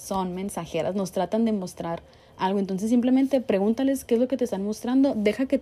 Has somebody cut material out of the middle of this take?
no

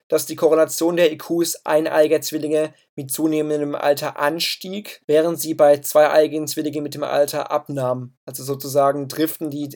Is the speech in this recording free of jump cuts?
no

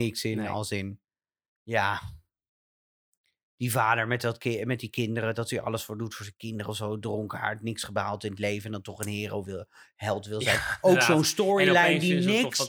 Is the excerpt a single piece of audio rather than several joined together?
yes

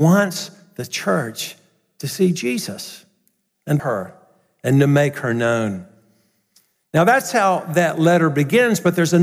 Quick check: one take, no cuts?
no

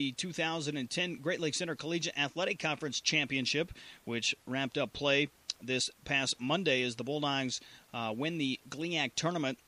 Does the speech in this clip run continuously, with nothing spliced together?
yes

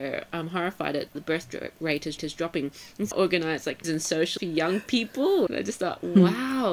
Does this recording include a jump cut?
yes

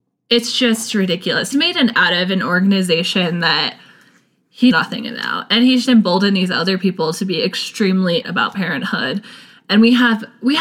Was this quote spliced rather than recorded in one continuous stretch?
yes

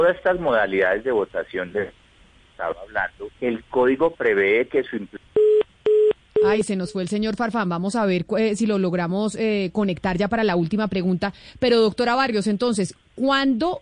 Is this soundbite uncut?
no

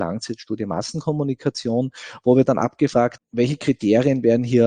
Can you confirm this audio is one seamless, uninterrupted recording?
no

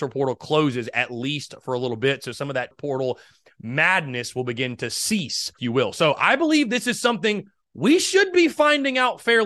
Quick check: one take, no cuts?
no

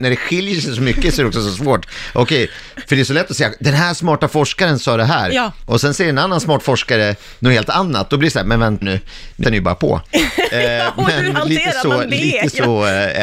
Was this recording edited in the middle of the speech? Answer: yes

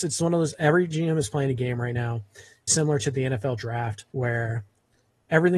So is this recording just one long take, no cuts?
no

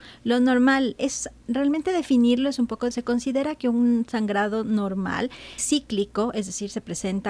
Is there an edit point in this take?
yes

